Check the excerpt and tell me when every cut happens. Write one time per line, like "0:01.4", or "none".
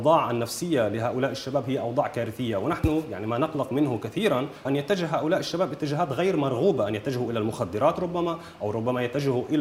0:04.6